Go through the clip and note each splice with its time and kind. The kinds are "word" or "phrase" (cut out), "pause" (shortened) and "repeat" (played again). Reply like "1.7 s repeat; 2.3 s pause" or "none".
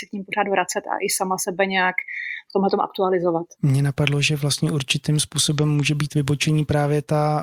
3.5 s pause